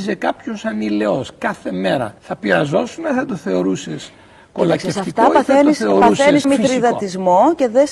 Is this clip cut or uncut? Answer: cut